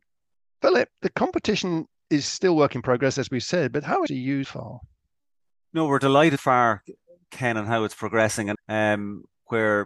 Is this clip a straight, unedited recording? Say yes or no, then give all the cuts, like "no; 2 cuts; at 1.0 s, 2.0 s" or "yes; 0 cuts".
no; 4 cuts; at 4.1 s, 4.4 s, 6.4 s, 8.6 s